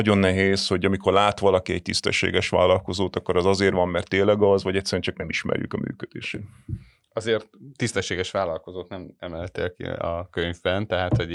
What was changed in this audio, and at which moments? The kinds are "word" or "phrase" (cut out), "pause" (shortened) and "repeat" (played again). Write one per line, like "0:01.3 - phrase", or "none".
0:07.7 - pause